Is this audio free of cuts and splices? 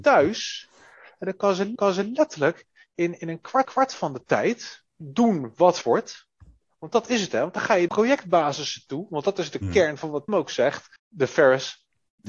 no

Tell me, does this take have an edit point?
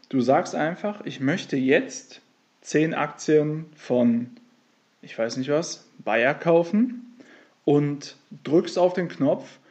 no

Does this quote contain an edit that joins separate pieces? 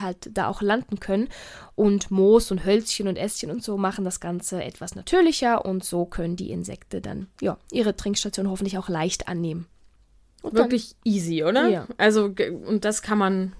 no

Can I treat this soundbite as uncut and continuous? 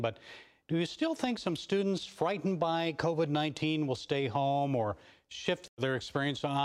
yes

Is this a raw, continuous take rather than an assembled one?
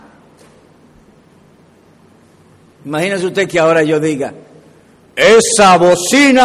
yes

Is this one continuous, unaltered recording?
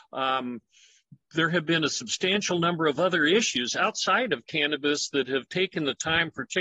yes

